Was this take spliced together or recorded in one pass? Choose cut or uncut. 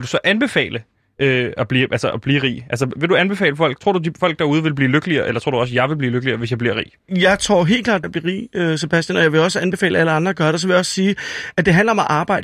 cut